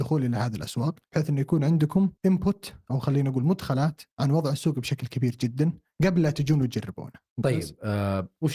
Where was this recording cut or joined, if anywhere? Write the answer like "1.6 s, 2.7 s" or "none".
1.0 s, 2.2 s, 4.1 s, 7.3 s